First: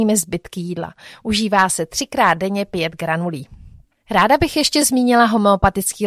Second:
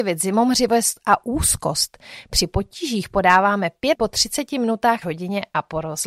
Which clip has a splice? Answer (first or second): second